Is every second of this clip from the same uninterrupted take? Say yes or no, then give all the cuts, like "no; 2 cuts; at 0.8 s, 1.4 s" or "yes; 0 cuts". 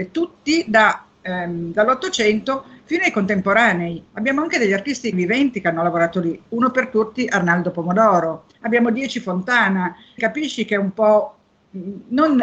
no; 4 cuts; at 1.1 s, 5.1 s, 8.5 s, 10.2 s